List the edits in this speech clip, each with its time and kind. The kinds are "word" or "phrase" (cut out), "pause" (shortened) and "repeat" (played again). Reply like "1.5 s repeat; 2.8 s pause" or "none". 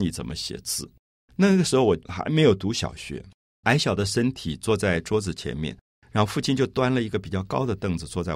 3.6 s word